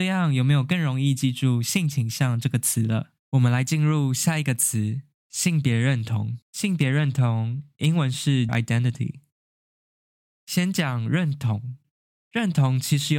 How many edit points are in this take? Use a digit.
3